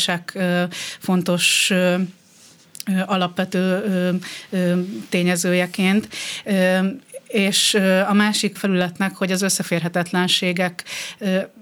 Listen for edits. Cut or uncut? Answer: cut